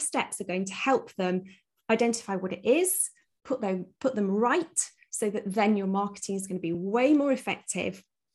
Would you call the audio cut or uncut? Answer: uncut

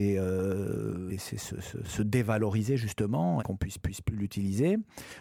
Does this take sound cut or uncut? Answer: cut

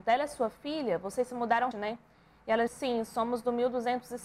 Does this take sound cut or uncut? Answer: cut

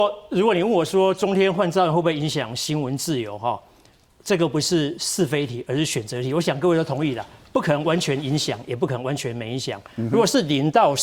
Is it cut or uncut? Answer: uncut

